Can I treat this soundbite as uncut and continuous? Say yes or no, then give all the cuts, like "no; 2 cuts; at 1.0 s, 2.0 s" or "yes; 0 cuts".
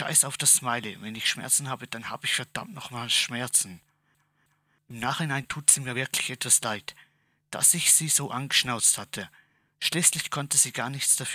yes; 0 cuts